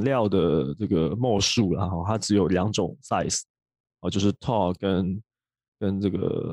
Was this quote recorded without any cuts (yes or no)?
yes